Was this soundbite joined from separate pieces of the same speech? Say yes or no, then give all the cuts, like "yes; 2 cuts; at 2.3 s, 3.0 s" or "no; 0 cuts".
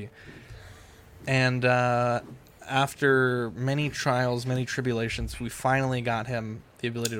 no; 0 cuts